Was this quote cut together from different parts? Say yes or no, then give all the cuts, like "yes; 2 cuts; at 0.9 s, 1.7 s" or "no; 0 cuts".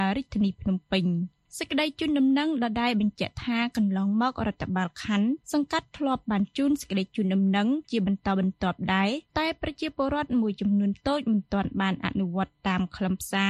no; 0 cuts